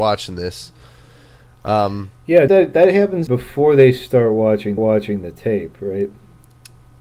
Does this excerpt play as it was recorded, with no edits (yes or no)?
no